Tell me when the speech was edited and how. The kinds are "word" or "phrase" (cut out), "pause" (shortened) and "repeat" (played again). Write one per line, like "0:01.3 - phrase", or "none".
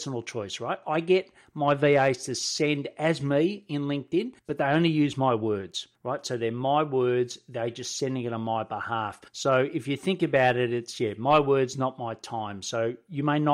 0:04.4 - pause
0:05.9 - pause
0:09.3 - pause